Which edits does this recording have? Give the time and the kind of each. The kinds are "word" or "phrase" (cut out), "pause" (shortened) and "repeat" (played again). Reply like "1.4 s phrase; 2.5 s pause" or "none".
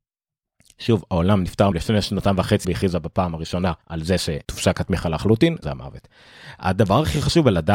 1.7 s word; 2.6 s word; 3.8 s pause; 4.4 s pause; 5.6 s word